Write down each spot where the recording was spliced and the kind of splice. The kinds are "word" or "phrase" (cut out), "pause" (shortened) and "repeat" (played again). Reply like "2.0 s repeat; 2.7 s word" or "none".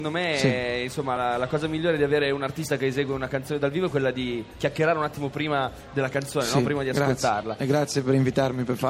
none